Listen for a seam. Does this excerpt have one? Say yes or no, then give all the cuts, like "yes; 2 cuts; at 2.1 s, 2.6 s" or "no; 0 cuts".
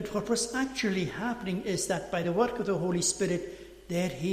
no; 0 cuts